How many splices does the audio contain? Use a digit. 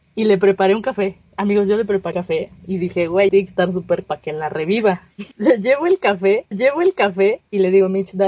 7